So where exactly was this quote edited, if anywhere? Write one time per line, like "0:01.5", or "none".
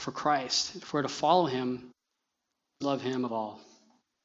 0:02.8
0:03.3